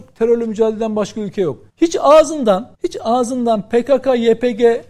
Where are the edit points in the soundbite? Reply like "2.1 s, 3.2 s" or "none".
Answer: 1.7 s, 2.7 s